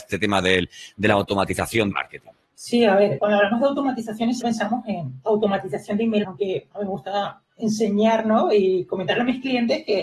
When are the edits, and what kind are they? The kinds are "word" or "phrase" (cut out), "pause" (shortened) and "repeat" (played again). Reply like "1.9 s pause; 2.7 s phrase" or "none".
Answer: 1.9 s phrase; 2.4 s pause; 3.2 s word; 4.4 s word; 6.2 s word